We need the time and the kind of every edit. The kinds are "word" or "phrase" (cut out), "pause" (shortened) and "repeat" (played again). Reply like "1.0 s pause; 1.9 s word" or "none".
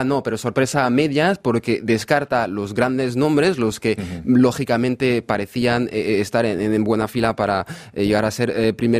none